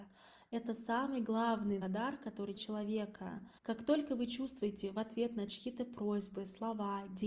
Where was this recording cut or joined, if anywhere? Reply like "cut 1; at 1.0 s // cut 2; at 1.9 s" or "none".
cut 1; at 1.8 s // cut 2; at 2.5 s // cut 3; at 3.6 s